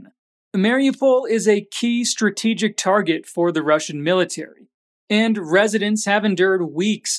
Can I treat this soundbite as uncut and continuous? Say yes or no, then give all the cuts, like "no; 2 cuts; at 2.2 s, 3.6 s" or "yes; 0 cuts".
yes; 0 cuts